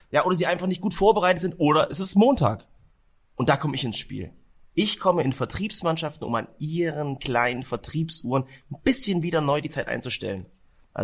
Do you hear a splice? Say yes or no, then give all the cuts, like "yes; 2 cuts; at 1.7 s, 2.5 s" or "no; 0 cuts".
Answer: no; 0 cuts